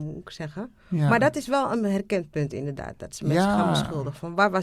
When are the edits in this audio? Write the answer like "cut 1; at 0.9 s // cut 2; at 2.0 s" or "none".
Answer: none